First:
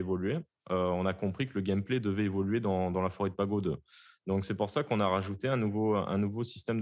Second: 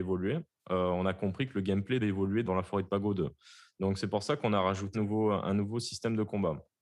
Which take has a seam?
second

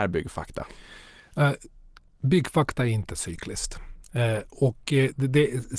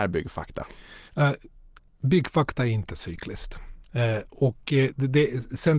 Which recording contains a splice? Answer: second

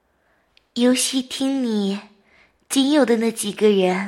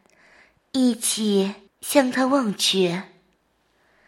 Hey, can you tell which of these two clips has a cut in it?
second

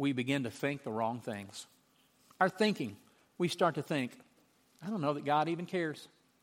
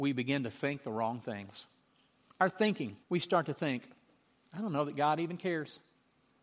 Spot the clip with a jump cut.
second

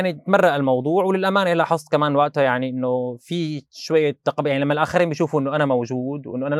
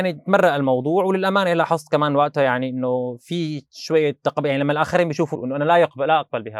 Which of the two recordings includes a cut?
second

